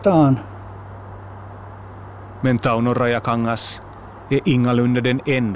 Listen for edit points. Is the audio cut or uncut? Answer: uncut